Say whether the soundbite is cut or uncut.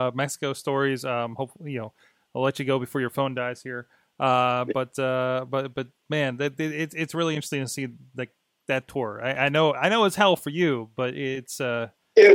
uncut